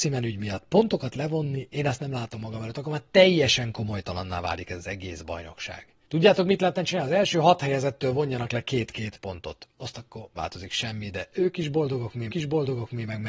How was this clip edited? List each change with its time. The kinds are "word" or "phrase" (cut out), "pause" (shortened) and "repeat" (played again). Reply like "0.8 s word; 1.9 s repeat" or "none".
6.0 s pause; 10.3 s word; 12.3 s repeat